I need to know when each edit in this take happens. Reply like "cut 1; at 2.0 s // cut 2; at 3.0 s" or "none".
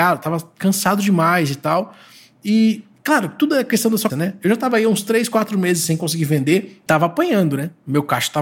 cut 1; at 4.1 s // cut 2; at 6.9 s